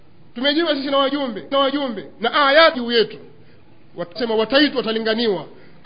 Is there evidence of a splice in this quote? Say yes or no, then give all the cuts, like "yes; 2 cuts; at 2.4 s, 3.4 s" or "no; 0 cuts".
yes; 3 cuts; at 1.5 s, 2.7 s, 4.2 s